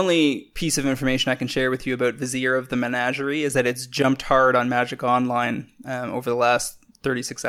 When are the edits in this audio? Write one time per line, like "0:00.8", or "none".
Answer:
none